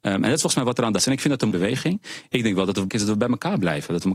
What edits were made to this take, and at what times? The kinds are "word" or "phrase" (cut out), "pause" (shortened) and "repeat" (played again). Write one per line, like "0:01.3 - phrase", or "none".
0:01.0 - word
0:01.5 - word
0:02.9 - word